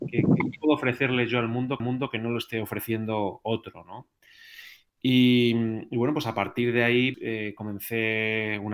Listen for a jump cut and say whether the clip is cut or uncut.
cut